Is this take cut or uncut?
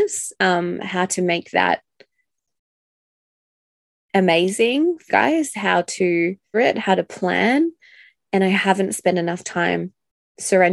cut